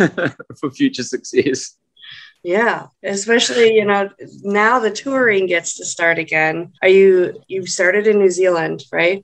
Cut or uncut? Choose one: cut